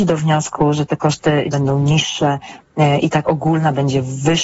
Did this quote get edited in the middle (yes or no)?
yes